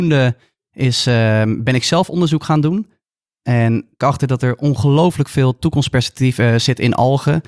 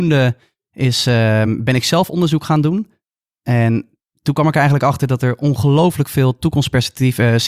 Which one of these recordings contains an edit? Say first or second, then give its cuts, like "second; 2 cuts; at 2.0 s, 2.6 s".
first; 1 cut; at 4.0 s